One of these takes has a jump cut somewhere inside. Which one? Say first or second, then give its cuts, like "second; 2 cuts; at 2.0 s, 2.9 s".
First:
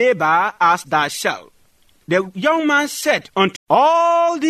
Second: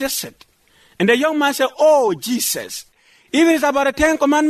first; 1 cut; at 3.6 s